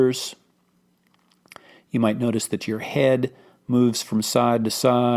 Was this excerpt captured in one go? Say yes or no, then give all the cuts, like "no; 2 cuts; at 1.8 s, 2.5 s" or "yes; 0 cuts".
yes; 0 cuts